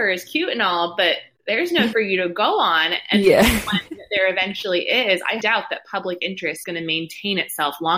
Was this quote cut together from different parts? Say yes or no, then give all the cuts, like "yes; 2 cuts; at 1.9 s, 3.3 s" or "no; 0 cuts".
yes; 3 cuts; at 1.9 s, 5.4 s, 6.6 s